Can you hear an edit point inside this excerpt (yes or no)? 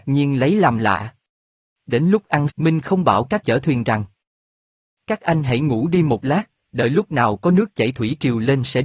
yes